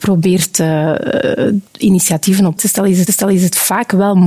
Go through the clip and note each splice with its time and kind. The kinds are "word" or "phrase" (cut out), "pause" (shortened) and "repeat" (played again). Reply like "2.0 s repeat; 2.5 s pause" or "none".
1.7 s pause; 2.6 s word; 3.1 s repeat